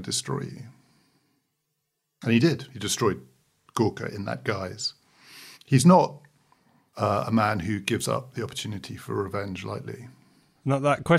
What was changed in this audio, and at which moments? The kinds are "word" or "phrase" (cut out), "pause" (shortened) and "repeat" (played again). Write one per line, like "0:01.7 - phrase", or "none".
0:05.5 - pause